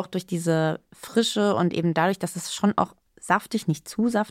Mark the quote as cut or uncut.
uncut